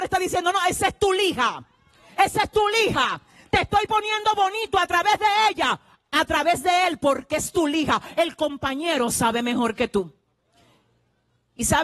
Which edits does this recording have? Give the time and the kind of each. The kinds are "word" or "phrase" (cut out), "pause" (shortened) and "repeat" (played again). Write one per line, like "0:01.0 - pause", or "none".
none